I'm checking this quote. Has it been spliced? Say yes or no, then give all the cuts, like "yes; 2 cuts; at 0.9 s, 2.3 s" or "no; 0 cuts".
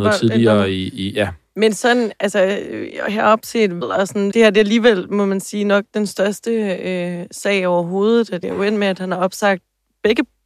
yes; 3 cuts; at 3.8 s, 4.3 s, 8.4 s